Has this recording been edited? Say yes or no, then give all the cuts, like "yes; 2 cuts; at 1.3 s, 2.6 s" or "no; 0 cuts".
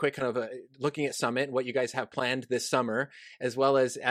no; 0 cuts